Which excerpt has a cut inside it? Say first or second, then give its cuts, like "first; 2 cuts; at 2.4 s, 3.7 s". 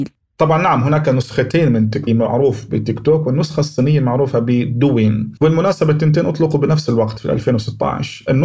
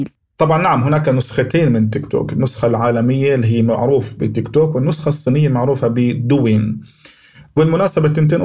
first; 2 cuts; at 2.1 s, 5.4 s